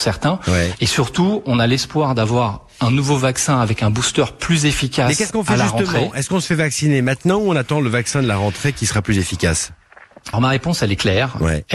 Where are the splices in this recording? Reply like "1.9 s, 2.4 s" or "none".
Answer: 10.3 s